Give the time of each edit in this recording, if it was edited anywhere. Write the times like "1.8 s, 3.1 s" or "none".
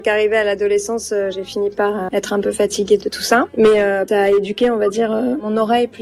3.0 s

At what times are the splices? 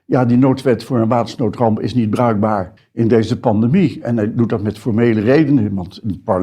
2.8 s

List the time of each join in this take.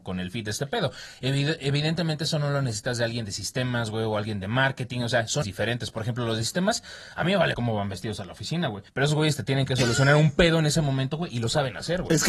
5.4 s, 7.5 s, 8.9 s

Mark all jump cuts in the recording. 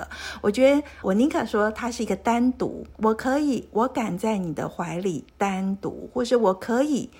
1.0 s, 2.9 s, 5.3 s

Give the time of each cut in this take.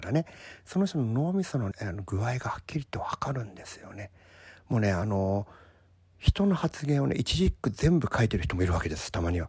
1.7 s

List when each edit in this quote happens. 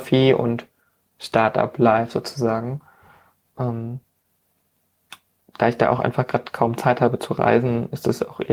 none

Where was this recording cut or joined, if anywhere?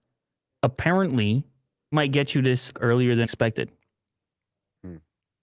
1.9 s, 2.7 s, 3.2 s

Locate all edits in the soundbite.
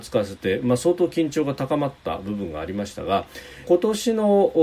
3.6 s

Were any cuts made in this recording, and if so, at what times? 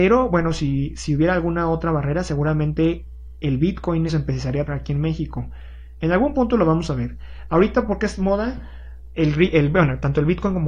4.1 s, 4.7 s

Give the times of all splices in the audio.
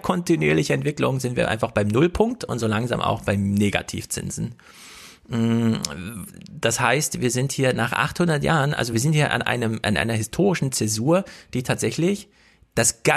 none

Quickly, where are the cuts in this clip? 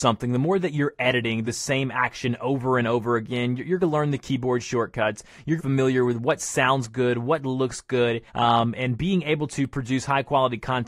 1.5 s, 3.8 s, 5.6 s, 8.3 s

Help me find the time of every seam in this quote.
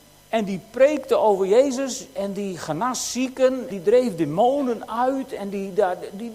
3.7 s

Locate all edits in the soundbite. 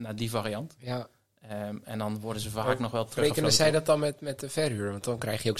none

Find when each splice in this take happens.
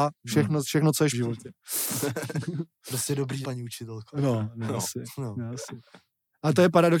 1.1 s, 3.4 s

